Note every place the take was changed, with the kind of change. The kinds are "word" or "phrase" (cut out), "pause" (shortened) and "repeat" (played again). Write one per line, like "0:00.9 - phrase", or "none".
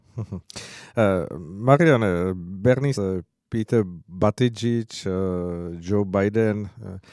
0:02.9 - word